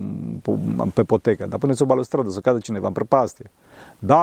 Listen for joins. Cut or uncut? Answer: uncut